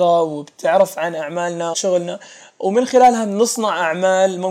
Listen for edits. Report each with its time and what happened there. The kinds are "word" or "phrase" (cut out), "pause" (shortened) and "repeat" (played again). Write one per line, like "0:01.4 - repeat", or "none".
0:01.7 - word